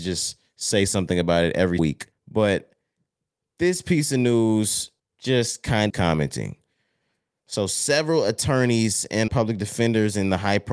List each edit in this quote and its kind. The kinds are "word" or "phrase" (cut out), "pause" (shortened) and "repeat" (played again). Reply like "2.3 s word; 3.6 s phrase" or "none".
1.8 s word; 2.1 s pause; 5.0 s pause; 5.9 s phrase; 9.3 s word